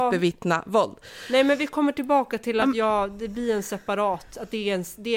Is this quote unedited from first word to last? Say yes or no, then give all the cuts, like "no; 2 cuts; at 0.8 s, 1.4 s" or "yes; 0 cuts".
yes; 0 cuts